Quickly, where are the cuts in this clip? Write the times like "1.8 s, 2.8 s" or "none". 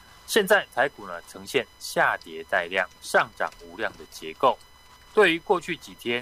3.0 s